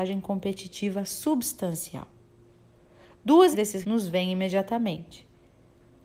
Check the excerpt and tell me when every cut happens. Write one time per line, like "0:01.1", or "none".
0:03.5
0:03.8